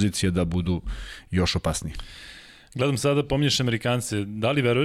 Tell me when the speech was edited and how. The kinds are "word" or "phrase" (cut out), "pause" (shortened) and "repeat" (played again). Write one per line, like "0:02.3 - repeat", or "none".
none